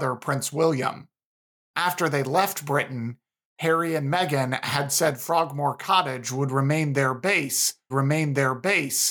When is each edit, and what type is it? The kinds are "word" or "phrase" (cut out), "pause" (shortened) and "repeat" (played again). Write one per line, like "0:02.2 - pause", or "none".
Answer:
0:07.9 - repeat